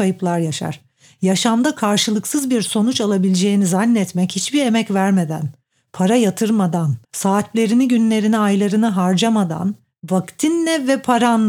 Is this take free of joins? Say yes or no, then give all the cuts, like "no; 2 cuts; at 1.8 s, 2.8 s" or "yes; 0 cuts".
no; 1 cut; at 7.0 s